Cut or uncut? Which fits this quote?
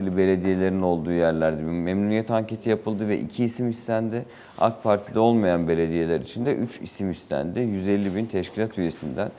uncut